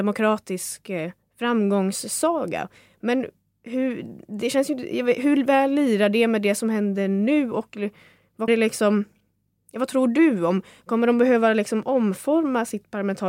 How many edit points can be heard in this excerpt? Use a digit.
1